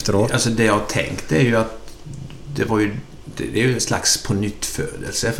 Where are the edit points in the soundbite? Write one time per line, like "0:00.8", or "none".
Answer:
none